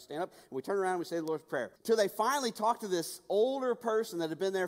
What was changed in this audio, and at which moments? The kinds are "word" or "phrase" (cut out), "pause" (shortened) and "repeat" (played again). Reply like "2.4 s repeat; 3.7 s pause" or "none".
1.8 s pause

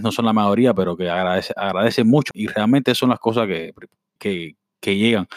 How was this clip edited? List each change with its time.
2.3 s word; 4.2 s word

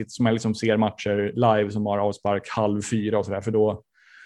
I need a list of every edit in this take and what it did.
none

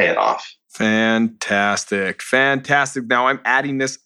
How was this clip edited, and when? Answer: none

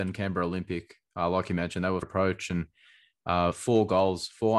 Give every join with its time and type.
2.0 s phrase

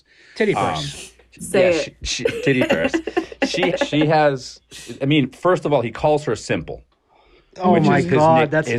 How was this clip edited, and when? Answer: 2.0 s word; 3.7 s word

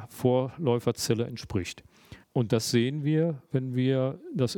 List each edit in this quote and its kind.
2.2 s pause

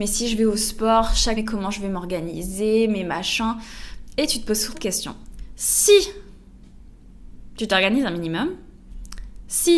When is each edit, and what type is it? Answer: 1.4 s word; 4.7 s word

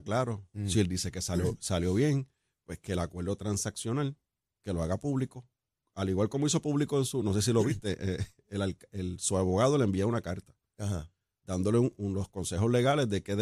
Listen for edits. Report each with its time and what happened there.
none

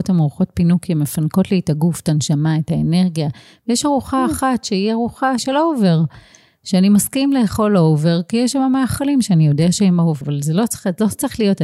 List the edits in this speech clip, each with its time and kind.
5.4 s word; 10.2 s word

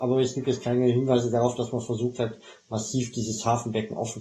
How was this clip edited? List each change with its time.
none

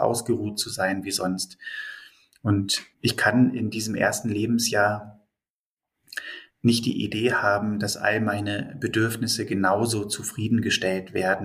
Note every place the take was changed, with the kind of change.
2.9 s pause; 6.5 s pause

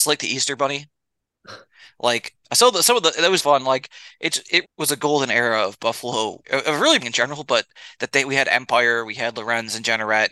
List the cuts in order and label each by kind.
3.4 s word; 4.6 s word; 6.4 s word; 7.0 s word

